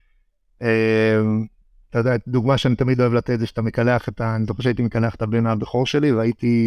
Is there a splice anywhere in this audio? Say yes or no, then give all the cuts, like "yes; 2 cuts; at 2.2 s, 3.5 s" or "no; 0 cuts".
no; 0 cuts